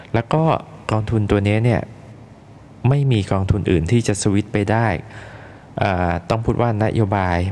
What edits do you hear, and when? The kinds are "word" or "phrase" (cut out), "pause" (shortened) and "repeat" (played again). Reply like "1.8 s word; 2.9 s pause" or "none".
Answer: none